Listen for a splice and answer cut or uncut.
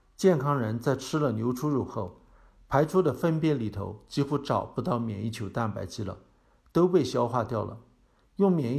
uncut